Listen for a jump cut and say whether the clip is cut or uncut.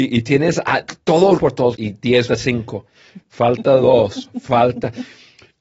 cut